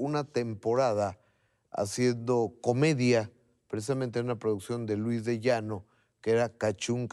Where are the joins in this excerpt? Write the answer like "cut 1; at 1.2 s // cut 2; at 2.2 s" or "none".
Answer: none